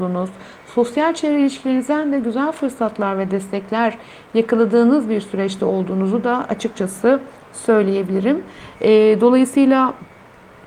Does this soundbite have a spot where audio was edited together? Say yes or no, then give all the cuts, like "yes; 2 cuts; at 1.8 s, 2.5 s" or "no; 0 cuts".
no; 0 cuts